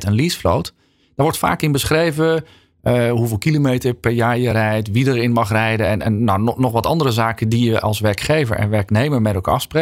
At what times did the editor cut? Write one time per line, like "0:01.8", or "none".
none